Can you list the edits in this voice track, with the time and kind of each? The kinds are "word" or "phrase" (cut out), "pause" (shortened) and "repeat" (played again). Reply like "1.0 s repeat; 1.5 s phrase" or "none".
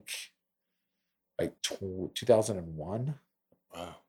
1.6 s pause